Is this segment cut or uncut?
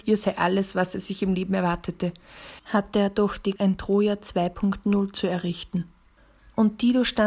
cut